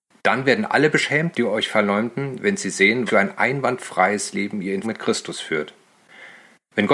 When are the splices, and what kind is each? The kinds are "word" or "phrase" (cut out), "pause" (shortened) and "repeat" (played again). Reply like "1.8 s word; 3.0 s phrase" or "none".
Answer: 1.3 s word; 3.1 s word; 4.8 s word

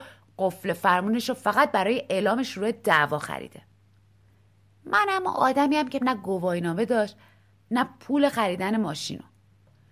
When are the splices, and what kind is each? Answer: 6.0 s word

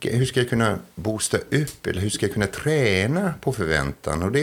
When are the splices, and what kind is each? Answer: none

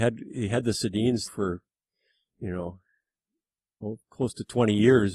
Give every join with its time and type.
1.3 s word; 3.8 s word

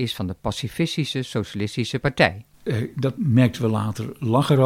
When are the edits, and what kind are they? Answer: 2.5 s pause; 3.2 s phrase

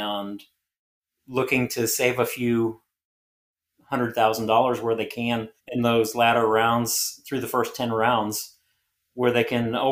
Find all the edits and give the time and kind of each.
5.6 s pause

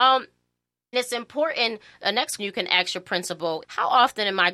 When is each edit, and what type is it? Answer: 0.9 s word; 2.4 s word; 3.6 s word

